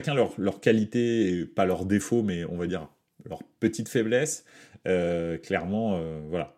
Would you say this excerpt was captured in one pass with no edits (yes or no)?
yes